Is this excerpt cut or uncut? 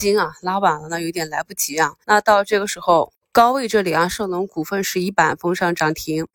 cut